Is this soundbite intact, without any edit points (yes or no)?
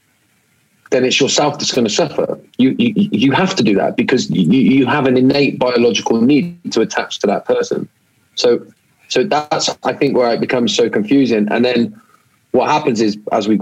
yes